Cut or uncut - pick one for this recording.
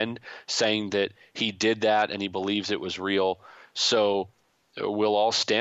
uncut